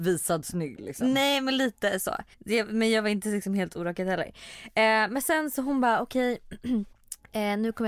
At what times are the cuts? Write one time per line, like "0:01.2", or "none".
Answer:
0:02.3
0:06.9